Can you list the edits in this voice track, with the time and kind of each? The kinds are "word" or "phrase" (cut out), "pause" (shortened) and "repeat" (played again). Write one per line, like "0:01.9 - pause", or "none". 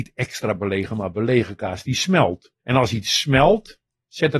0:02.6 - pause